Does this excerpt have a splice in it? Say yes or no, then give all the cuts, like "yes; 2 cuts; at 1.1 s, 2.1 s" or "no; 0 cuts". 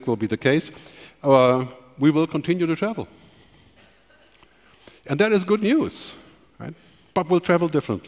no; 0 cuts